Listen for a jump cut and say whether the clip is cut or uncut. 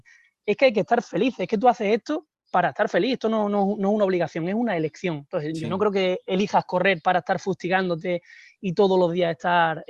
uncut